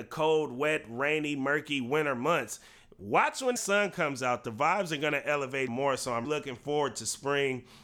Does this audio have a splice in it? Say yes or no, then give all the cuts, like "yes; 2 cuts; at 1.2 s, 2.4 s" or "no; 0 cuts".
yes; 3 cuts; at 3.6 s, 5.7 s, 6.2 s